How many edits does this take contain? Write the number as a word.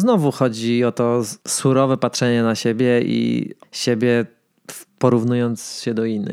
three